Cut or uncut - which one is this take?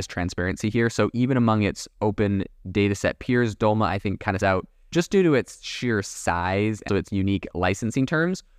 cut